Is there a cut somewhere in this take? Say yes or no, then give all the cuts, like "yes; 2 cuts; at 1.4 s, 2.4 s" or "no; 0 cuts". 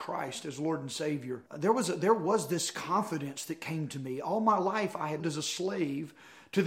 yes; 2 cuts; at 1.5 s, 5.2 s